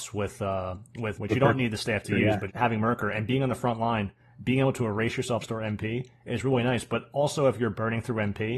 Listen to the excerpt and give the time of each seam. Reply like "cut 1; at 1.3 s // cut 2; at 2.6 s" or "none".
cut 1; at 1.1 s // cut 2; at 2.5 s // cut 3; at 5.4 s